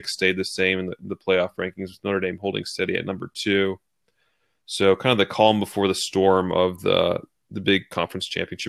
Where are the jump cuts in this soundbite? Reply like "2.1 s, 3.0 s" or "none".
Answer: none